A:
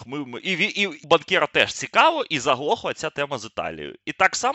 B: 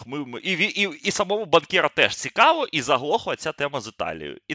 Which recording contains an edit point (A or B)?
A